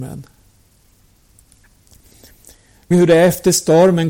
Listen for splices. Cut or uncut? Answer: cut